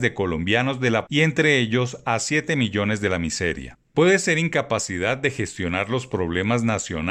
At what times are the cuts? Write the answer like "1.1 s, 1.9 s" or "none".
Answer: 1.1 s